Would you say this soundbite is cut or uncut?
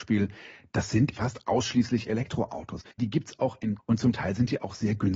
cut